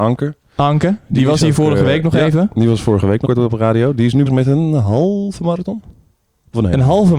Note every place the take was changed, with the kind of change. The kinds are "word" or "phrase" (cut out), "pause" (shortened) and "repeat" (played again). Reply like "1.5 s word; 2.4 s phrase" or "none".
3.2 s word; 4.3 s word